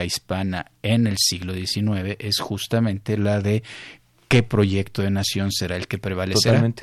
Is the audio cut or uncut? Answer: uncut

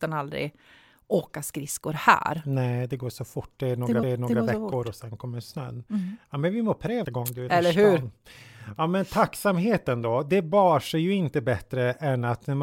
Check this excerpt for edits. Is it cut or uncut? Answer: cut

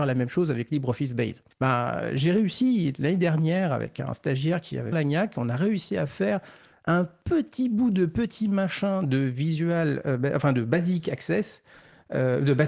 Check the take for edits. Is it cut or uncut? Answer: cut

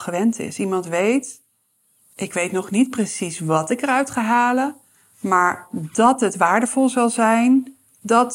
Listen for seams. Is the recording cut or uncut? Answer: uncut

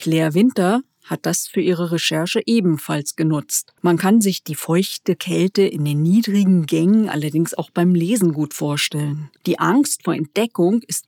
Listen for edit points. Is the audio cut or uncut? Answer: cut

